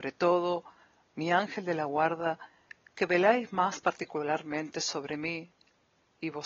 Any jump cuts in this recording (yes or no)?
no